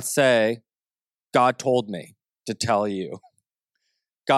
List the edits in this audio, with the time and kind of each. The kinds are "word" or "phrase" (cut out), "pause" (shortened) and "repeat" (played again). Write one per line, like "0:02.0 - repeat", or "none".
none